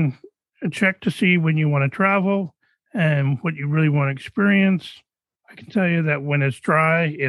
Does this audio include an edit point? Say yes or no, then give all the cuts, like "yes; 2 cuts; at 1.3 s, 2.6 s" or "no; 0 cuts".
no; 0 cuts